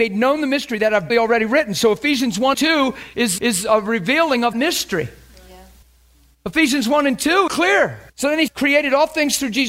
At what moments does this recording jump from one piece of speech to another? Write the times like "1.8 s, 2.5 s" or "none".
1.1 s, 2.5 s, 3.4 s, 4.5 s, 5.8 s, 7.5 s, 8.1 s, 8.5 s